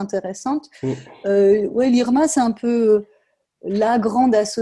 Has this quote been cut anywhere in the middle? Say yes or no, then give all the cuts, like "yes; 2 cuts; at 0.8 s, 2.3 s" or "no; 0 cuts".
no; 0 cuts